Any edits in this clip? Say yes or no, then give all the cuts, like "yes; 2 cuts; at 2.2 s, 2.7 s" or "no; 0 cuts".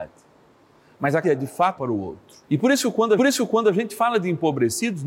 yes; 4 cuts; at 1.2 s, 1.8 s, 2.4 s, 3.2 s